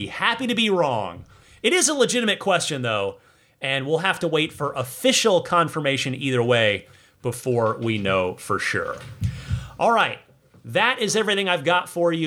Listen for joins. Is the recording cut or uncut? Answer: uncut